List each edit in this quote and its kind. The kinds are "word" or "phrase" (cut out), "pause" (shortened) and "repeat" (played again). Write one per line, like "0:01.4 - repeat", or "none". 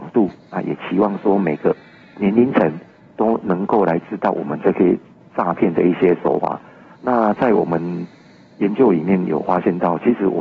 none